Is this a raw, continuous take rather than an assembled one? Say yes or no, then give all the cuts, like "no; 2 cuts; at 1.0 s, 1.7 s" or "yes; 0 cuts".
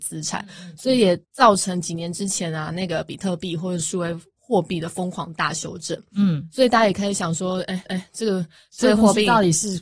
no; 2 cuts; at 1.2 s, 7.9 s